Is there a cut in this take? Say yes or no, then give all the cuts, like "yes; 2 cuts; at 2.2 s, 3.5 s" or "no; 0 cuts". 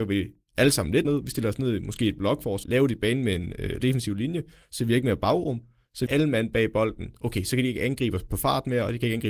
yes; 4 cuts; at 1.0 s, 2.6 s, 3.8 s, 6.1 s